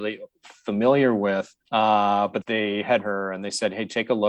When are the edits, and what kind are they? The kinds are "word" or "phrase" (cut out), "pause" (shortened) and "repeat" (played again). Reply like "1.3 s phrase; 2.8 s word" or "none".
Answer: 1.6 s pause; 2.4 s word; 3.0 s word